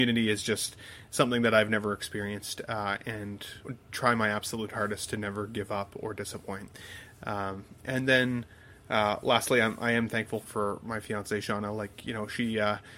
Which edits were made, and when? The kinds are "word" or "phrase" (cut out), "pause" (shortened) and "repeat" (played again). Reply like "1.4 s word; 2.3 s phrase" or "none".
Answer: 3.6 s word; 10.4 s word